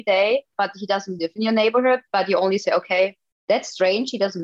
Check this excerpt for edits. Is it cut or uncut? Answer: uncut